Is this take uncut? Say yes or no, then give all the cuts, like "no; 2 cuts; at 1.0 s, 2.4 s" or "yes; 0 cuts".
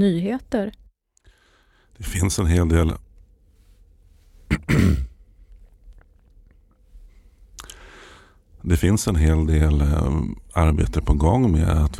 yes; 0 cuts